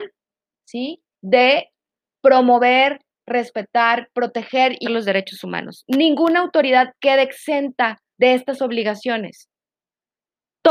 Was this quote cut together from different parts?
yes; 3 cuts; at 1.1 s, 4.8 s, 8.1 s

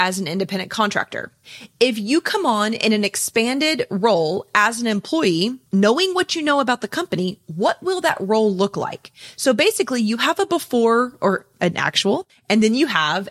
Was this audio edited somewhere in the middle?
yes; 1 cut; at 5.7 s

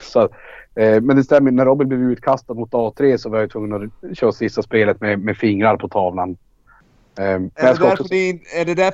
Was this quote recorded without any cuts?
no; 1 cut; at 7.5 s

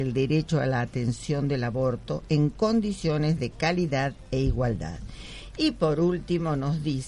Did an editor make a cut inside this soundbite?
no; 0 cuts

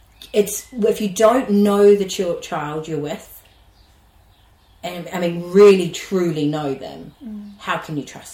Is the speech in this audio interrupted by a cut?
no; 0 cuts

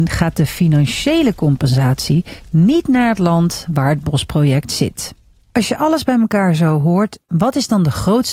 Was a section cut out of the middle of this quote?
no; 0 cuts

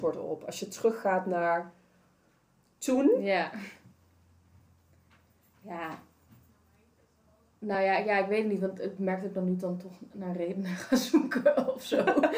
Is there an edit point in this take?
no; 0 cuts

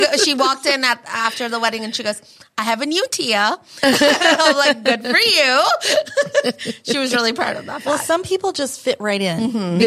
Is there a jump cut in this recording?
no; 0 cuts

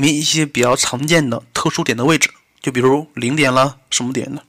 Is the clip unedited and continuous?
yes; 0 cuts

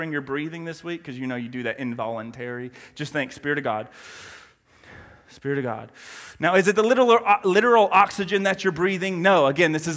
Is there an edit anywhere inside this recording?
no; 0 cuts

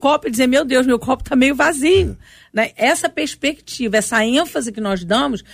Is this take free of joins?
yes; 0 cuts

